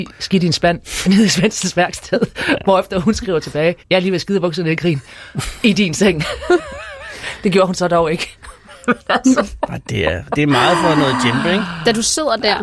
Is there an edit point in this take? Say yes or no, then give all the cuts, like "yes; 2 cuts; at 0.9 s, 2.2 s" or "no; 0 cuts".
yes; 3 cuts; at 1.0 s, 3.8 s, 10.3 s